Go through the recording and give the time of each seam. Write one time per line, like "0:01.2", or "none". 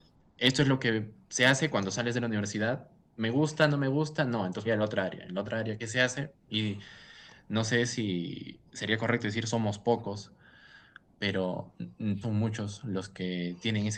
0:04.6
0:05.8
0:06.4
0:08.7
0:12.2